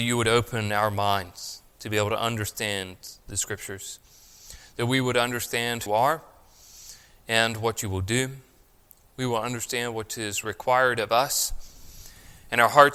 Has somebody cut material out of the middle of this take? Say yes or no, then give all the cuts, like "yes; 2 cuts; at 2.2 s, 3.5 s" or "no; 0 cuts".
yes; 1 cut; at 5.9 s